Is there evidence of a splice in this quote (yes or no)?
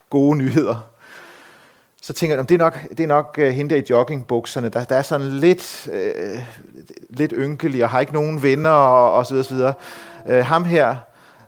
no